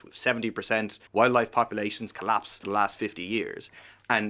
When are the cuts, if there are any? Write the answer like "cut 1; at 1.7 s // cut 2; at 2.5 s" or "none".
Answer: cut 1; at 1.1 s // cut 2; at 2.6 s